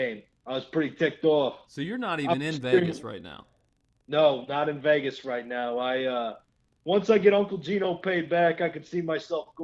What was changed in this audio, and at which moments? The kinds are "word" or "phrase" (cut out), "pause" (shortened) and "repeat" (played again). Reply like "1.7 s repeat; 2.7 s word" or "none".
none